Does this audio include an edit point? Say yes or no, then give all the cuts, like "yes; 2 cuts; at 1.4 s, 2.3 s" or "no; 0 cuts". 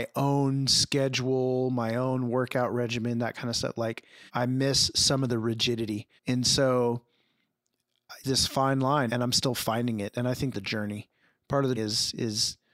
yes; 7 cuts; at 4.3 s, 6.2 s, 8.2 s, 9.1 s, 10.5 s, 11.2 s, 11.8 s